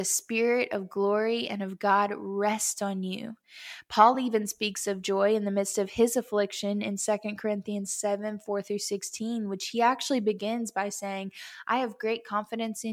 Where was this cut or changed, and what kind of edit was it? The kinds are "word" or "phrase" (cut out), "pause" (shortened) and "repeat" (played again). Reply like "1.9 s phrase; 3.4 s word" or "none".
none